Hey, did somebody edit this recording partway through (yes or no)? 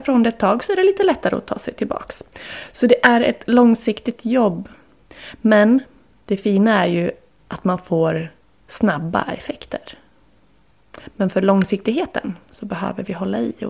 no